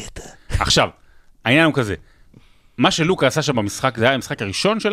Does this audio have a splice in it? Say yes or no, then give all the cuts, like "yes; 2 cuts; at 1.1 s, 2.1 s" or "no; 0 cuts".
no; 0 cuts